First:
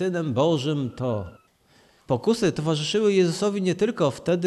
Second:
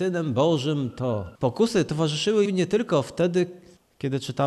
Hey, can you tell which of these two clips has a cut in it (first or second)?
second